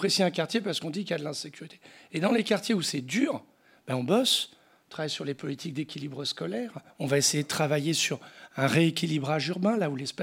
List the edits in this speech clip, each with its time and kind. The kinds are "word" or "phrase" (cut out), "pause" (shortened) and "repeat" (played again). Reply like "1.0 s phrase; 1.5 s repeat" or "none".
6.9 s pause